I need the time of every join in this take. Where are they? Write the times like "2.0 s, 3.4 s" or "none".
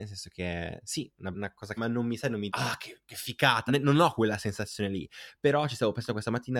1.3 s, 1.8 s, 2.5 s, 3.7 s